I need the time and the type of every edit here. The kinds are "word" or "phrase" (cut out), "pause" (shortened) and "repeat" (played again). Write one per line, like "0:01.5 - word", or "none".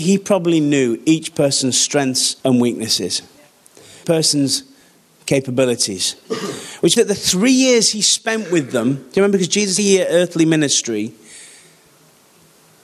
0:02.4 - pause
0:04.0 - phrase
0:07.0 - word
0:09.8 - phrase